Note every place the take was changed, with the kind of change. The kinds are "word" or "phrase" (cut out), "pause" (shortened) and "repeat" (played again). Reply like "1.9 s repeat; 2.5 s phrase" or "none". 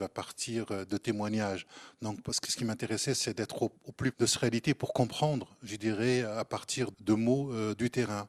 3.8 s pause; 4.1 s word; 6.9 s word